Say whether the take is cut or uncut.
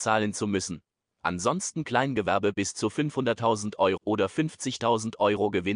cut